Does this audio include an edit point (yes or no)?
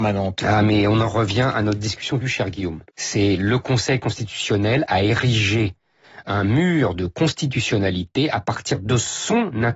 yes